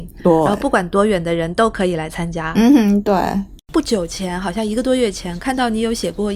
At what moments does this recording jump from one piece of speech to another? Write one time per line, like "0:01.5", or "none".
0:03.6